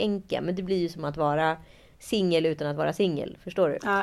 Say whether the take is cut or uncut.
uncut